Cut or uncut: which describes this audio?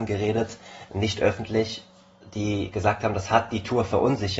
uncut